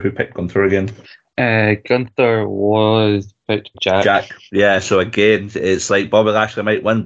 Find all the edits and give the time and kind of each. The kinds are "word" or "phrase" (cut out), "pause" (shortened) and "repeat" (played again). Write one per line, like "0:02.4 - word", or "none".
0:01.0 - pause
0:03.7 - word